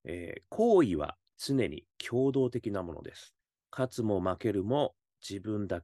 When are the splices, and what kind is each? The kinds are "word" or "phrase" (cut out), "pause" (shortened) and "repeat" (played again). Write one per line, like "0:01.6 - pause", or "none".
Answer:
0:01.3 - pause
0:03.4 - pause